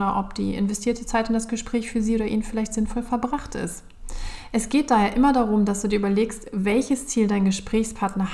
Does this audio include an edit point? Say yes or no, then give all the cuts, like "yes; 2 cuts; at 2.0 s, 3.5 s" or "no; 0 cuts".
no; 0 cuts